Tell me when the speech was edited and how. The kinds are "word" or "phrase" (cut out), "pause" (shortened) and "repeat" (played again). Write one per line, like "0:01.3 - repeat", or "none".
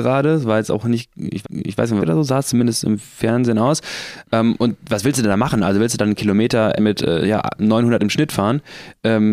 0:01.4 - repeat
0:02.0 - phrase
0:06.8 - word